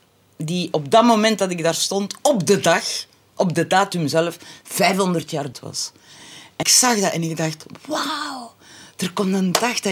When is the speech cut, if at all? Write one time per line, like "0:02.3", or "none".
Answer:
0:05.5
0:06.6